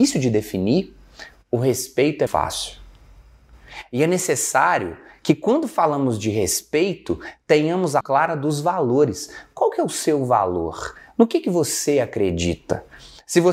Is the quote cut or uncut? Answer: cut